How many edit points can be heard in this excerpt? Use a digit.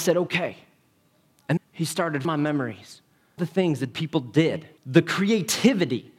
5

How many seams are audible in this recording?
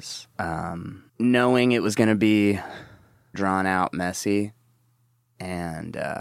2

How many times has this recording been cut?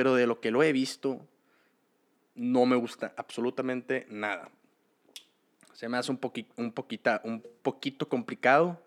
0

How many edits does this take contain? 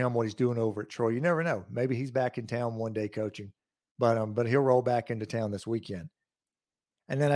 0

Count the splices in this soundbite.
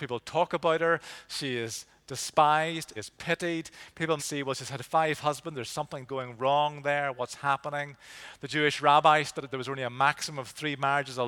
4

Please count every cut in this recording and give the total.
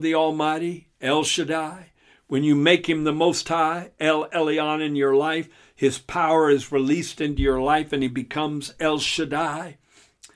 0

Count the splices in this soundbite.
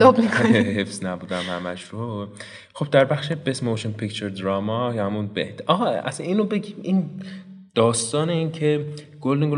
0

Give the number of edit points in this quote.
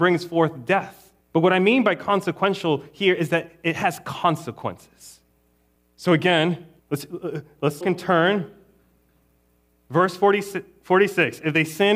4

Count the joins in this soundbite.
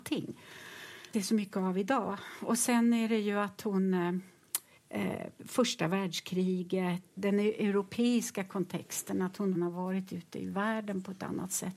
4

